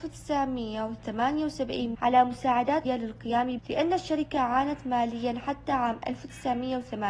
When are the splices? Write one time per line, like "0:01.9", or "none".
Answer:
0:01.9
0:02.8
0:03.6